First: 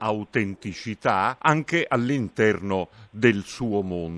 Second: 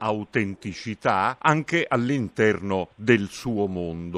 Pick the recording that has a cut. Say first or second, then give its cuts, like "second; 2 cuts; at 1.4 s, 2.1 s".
second; 1 cut; at 2.9 s